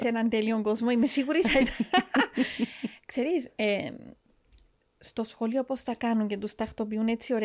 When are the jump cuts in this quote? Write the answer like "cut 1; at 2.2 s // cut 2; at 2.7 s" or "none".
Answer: none

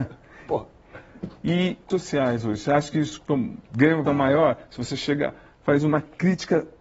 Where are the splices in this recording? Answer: cut 1; at 1.9 s // cut 2; at 3.6 s // cut 3; at 4.1 s

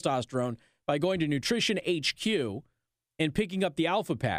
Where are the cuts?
none

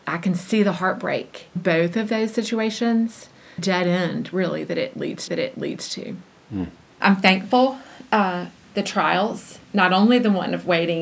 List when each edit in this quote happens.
cut 1; at 1.6 s // cut 2; at 3.6 s // cut 3; at 5.3 s // cut 4; at 6.8 s // cut 5; at 8.6 s

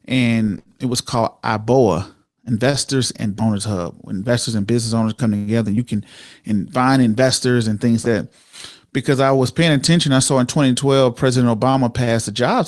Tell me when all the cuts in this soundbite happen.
cut 1; at 3.4 s // cut 2; at 8.0 s

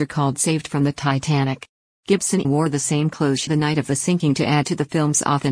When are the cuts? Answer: cut 1; at 2.4 s // cut 2; at 3.5 s

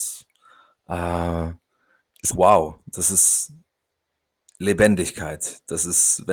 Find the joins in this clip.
cut 1; at 2.3 s

